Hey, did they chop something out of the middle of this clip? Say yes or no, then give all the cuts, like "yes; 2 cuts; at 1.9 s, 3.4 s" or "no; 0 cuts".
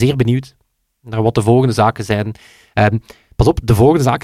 no; 0 cuts